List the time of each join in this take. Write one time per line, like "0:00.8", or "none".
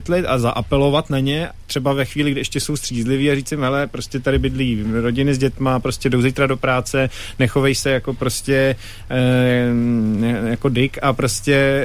none